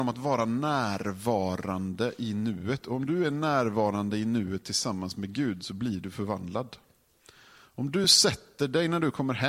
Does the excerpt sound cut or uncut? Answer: uncut